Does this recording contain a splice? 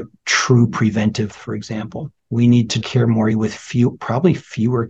yes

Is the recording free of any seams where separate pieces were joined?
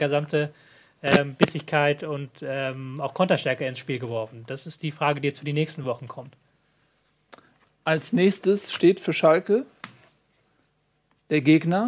yes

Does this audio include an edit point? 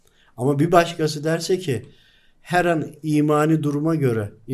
no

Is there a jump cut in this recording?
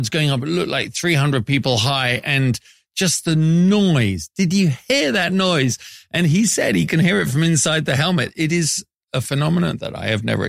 no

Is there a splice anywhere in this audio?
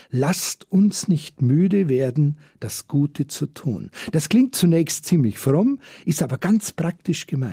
no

